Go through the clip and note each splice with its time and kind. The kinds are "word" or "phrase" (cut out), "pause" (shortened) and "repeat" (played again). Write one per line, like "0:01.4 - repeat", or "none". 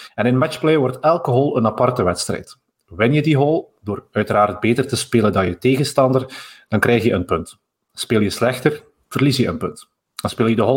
none